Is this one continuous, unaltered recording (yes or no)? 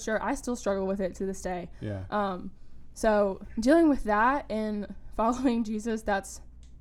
yes